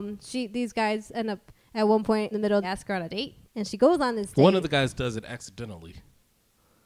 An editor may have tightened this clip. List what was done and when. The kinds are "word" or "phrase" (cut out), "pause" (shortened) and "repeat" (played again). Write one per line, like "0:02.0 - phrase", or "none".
0:02.3 - word
0:02.6 - phrase
0:03.4 - pause